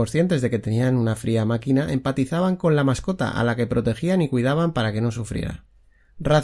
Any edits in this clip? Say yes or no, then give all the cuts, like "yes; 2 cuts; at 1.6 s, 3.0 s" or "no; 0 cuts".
no; 0 cuts